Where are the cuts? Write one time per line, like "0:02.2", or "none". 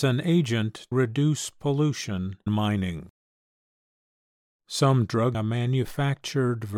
0:00.9
0:02.5
0:05.3